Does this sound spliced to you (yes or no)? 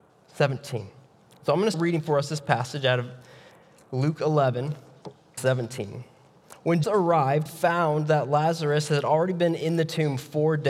yes